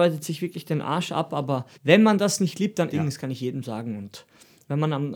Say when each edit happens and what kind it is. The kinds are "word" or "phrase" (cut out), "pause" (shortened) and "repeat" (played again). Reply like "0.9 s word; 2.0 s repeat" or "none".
1.7 s pause; 2.9 s phrase